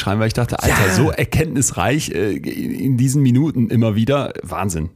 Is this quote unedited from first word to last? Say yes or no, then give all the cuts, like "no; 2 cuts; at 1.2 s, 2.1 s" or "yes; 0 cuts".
yes; 0 cuts